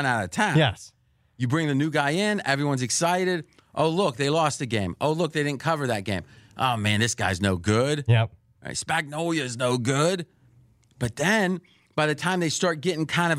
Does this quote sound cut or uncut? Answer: uncut